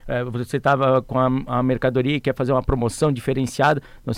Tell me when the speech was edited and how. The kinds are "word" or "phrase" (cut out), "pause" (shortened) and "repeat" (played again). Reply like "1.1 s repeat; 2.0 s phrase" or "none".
none